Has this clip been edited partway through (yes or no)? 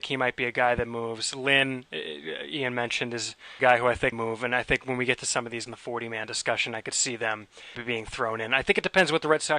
yes